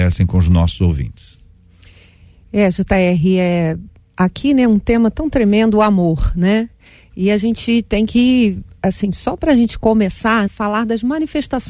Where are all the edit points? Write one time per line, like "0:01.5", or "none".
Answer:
0:10.5

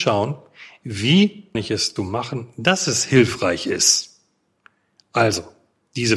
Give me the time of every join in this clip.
0:01.5
0:02.0

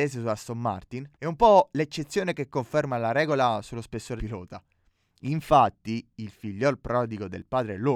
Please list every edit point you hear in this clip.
0:01.1
0:04.2

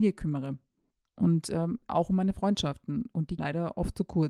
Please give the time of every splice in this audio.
0:01.9
0:03.4

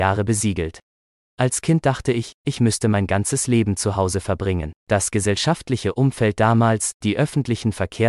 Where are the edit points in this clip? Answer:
0:04.8

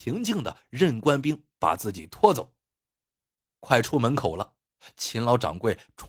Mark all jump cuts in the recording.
none

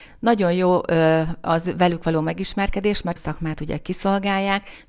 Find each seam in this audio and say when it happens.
0:03.2

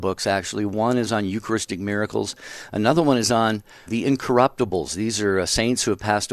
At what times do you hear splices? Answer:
0:03.9

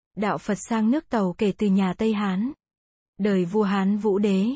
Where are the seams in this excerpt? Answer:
0:02.8

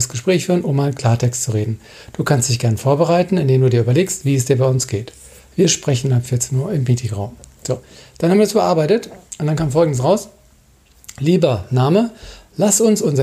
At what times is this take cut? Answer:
none

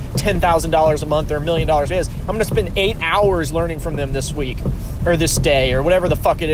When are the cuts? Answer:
0:01.9

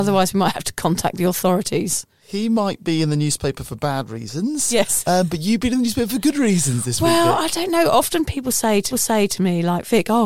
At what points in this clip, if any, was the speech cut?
0:08.9

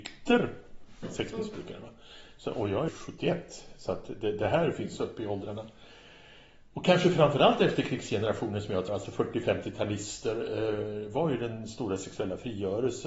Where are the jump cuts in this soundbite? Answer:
0:02.9
0:08.9

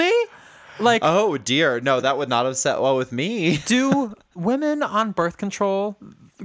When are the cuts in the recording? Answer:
none

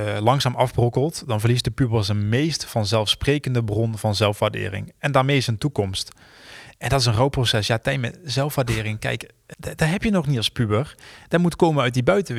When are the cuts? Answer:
none

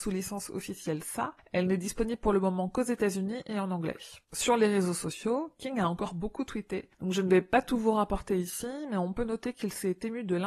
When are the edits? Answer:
0:04.2

